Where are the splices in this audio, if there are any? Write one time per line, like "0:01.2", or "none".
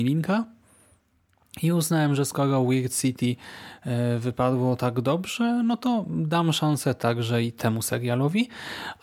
none